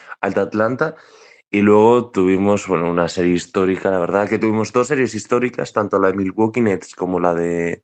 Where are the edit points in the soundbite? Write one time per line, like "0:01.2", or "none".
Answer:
none

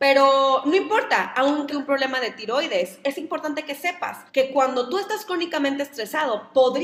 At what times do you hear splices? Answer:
0:01.7
0:04.3

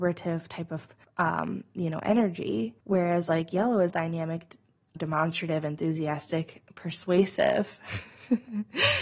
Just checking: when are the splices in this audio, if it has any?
0:01.0
0:02.8
0:03.9
0:05.0

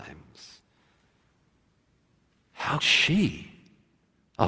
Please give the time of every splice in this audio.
0:02.8

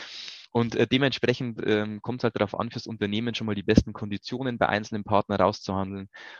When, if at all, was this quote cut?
none

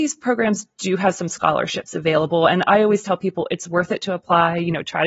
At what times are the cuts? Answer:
none

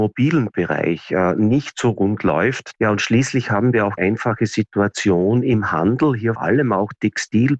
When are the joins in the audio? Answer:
0:04.0
0:06.4

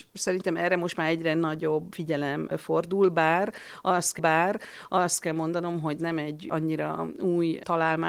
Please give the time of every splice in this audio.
0:04.2
0:06.0

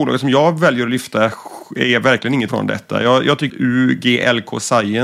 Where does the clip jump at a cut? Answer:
0:02.5
0:03.5

